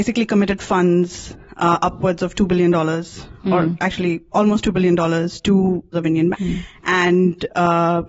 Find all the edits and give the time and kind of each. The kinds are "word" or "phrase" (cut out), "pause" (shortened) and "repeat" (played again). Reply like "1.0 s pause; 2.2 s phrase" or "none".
5.9 s phrase; 6.3 s word